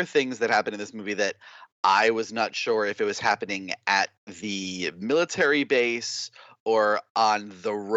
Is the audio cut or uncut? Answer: uncut